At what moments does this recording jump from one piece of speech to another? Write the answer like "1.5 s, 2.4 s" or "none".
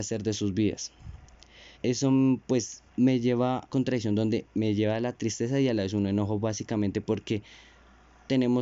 1.7 s, 2.9 s, 3.7 s